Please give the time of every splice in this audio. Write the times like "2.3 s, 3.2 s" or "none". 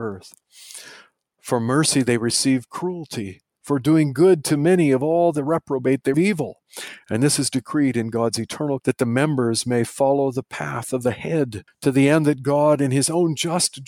6.1 s, 8.8 s, 11.7 s